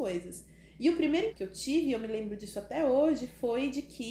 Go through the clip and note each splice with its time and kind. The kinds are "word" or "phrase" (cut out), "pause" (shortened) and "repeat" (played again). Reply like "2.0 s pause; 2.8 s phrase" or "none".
1.3 s word